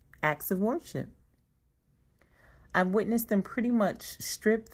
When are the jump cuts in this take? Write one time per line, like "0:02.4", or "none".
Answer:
none